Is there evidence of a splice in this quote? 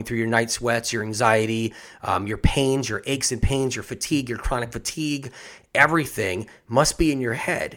no; 0 cuts

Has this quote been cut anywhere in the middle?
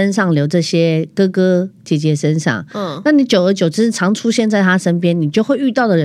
yes; 1 cut; at 1.8 s

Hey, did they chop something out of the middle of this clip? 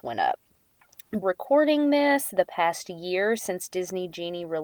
yes; 1 cut; at 1.2 s

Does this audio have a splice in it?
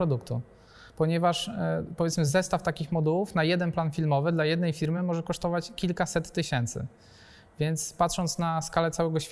no; 0 cuts

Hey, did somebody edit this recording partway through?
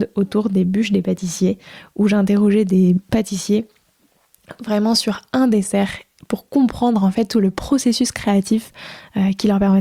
no; 0 cuts

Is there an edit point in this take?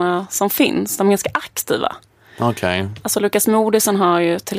no; 0 cuts

